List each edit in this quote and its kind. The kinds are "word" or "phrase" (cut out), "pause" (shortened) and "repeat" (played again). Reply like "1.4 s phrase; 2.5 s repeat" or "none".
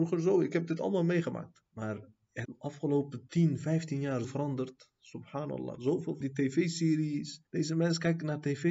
1.7 s pause; 2.4 s word; 4.2 s word; 6.2 s word; 7.5 s pause